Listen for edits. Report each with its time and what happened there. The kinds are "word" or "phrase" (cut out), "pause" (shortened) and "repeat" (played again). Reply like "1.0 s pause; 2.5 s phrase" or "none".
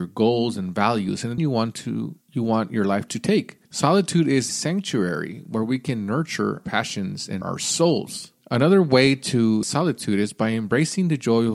1.4 s word; 2.2 s pause; 3.6 s pause; 4.5 s word; 6.6 s word; 7.4 s word; 8.4 s pause; 9.6 s word

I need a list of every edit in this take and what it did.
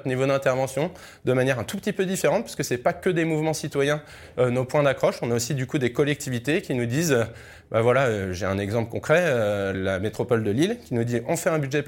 9.7 s word

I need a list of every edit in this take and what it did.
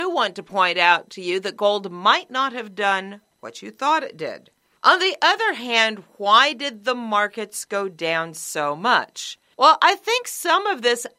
none

